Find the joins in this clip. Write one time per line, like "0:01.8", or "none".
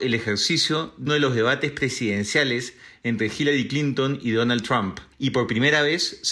0:01.1
0:05.1